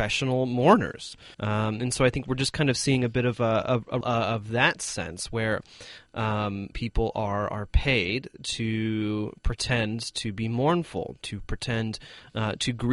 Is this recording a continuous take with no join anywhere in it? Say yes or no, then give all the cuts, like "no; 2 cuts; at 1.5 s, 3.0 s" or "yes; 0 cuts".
no; 3 cuts; at 1.3 s, 4.0 s, 6.7 s